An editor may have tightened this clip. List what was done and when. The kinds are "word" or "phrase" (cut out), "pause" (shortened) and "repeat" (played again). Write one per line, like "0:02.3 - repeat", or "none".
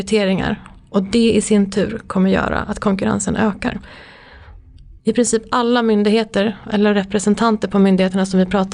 0:05.0 - pause